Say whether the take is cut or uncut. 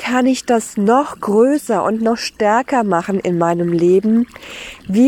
uncut